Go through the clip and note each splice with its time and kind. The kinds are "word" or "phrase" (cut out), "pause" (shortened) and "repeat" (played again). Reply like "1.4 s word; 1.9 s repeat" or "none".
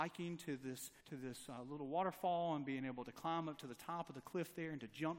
1.0 s pause